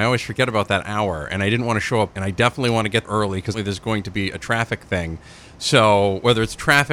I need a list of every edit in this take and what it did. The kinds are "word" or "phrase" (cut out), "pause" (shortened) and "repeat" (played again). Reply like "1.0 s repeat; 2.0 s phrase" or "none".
2.1 s word; 3.0 s word; 3.5 s word